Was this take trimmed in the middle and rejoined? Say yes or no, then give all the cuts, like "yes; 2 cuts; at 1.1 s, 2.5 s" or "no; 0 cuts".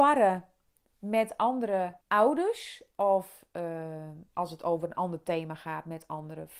yes; 2 cuts; at 2.0 s, 4.3 s